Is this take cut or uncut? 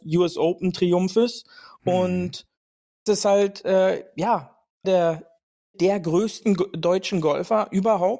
cut